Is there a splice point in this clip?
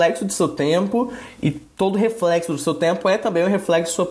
no; 0 cuts

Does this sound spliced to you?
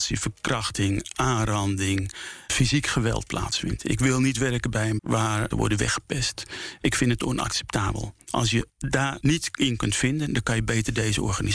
yes; 2 cuts; at 5.0 s, 5.5 s

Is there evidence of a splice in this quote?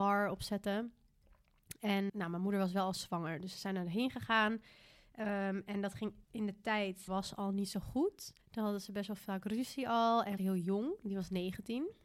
yes; 5 cuts; at 2.1 s, 6.2 s, 7.1 s, 8.4 s, 10.4 s

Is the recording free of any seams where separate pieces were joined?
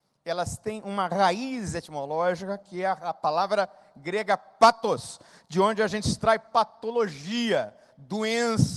yes; 0 cuts

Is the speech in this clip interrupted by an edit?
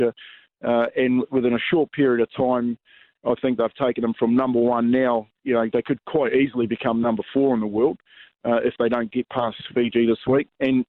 no; 0 cuts

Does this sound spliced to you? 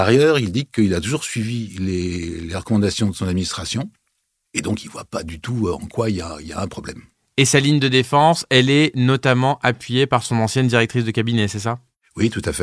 no; 0 cuts

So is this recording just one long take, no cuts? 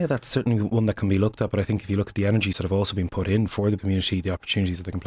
no; 2 cuts; at 2.5 s, 3.8 s

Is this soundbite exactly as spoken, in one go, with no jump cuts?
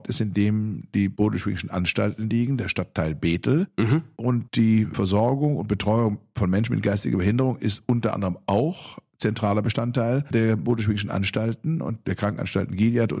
yes; 0 cuts

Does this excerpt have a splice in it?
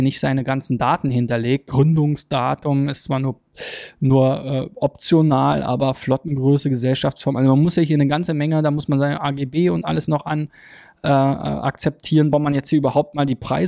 yes; 1 cut; at 12.3 s

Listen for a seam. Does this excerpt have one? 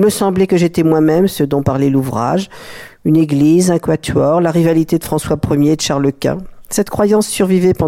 no; 0 cuts

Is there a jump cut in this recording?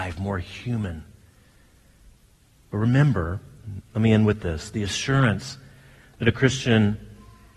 no; 0 cuts

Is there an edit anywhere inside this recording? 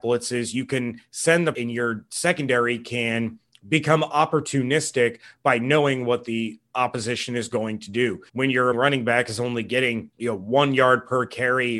yes; 4 cuts; at 1.5 s, 8.3 s, 8.7 s, 10.1 s

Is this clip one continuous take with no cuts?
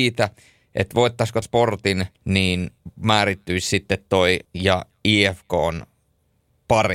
no; 3 cuts; at 1.4 s, 2.1 s, 4.4 s

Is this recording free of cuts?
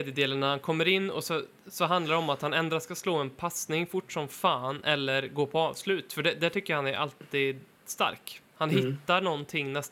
yes; 0 cuts

